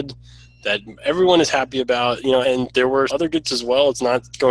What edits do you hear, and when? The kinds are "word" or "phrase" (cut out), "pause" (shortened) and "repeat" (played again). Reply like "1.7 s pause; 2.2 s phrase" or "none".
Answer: 2.4 s word; 3.1 s word; 3.4 s word